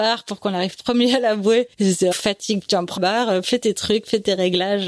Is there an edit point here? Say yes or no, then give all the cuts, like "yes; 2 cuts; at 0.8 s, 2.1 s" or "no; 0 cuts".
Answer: yes; 3 cuts; at 1.7 s, 2.1 s, 3.0 s